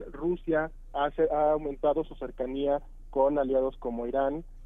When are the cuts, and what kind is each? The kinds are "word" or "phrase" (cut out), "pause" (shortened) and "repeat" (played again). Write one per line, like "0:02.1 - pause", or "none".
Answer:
none